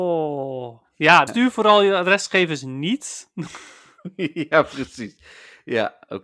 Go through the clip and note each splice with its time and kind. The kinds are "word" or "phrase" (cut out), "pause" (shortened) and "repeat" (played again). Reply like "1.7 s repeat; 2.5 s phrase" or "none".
1.3 s word